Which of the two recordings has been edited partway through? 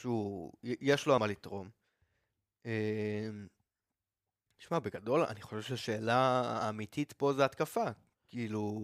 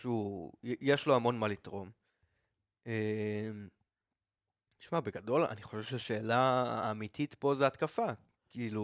first; 1 cut; at 1.2 s

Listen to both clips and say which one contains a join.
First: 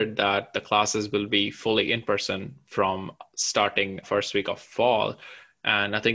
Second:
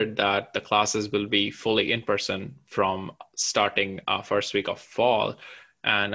first; 1 cut; at 4.0 s

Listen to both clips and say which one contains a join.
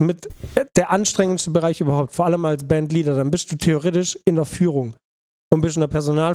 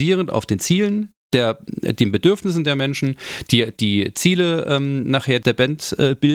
second; 1 cut; at 5.4 s

